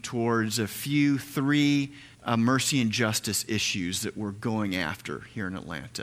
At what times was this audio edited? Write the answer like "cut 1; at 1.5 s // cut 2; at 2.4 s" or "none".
cut 1; at 2.1 s